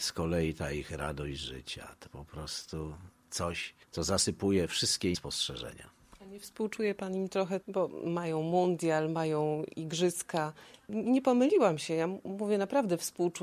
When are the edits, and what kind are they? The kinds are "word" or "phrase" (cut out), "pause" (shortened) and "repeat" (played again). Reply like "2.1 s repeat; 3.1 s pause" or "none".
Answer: 2.1 s word; 3.8 s pause; 5.1 s word; 7.6 s word

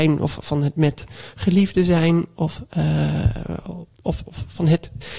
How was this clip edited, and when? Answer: none

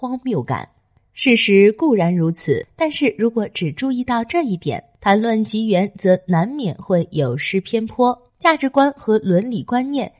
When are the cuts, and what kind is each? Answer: 8.3 s pause

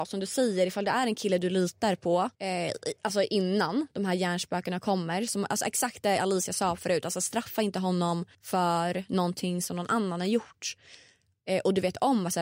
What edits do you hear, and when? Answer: 2.3 s pause; 8.3 s pause

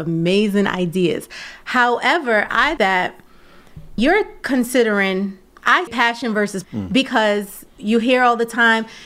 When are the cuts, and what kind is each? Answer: 2.8 s word; 4.0 s word; 5.9 s word; 6.6 s word

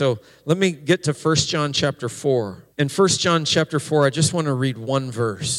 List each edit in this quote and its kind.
2.7 s pause

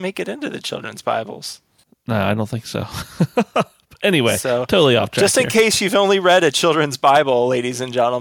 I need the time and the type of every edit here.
none

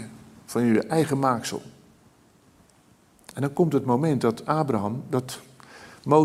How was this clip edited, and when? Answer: none

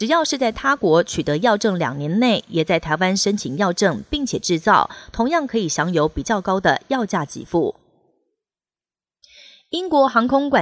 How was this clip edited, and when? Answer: none

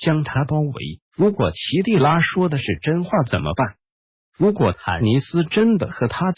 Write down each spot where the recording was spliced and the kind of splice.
1.0 s pause

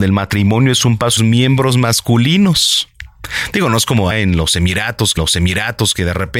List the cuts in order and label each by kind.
1.2 s phrase; 4.1 s word; 5.2 s repeat

